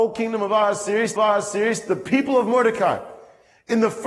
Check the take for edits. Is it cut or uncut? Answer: cut